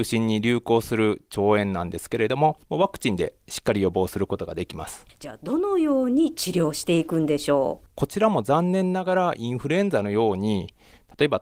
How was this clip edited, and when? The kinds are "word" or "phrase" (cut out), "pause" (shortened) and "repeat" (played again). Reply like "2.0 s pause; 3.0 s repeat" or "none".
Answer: 2.6 s pause